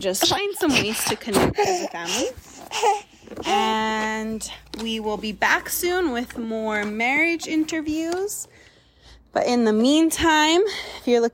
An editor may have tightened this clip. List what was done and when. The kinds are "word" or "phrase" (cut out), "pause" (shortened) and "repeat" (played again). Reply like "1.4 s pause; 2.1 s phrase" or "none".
none